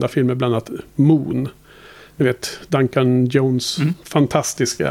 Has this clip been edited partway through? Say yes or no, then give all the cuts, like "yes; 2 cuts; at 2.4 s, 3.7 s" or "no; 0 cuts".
no; 0 cuts